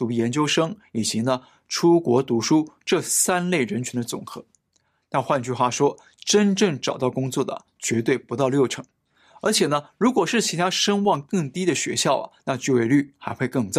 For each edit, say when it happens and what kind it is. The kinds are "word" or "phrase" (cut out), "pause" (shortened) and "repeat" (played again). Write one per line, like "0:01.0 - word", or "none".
none